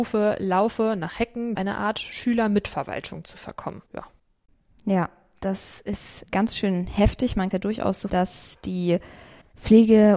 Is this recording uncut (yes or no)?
no